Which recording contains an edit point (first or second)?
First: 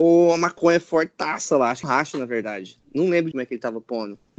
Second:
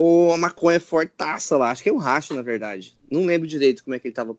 first